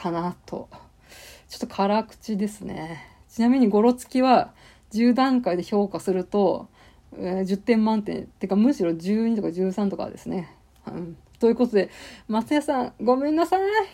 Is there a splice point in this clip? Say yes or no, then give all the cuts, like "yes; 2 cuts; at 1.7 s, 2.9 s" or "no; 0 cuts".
no; 0 cuts